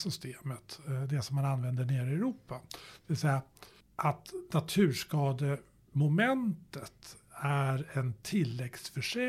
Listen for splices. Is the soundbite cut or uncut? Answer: uncut